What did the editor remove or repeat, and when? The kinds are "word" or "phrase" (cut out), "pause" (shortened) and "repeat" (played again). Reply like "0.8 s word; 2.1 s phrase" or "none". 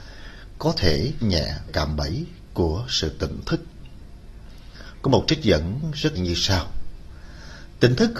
1.2 s word; 1.7 s word; 6.2 s word